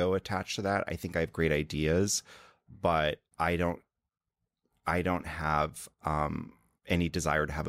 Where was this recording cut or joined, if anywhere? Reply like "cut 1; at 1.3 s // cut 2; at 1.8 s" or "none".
none